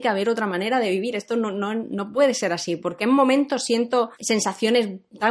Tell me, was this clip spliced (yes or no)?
yes